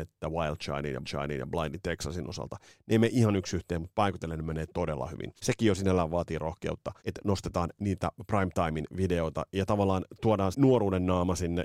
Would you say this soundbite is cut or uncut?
cut